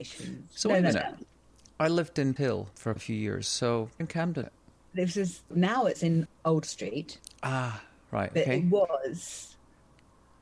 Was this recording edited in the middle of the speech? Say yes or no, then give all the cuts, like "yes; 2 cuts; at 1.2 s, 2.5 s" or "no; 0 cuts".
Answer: yes; 6 cuts; at 2.4 s, 3.0 s, 4.0 s, 4.4 s, 5.5 s, 6.3 s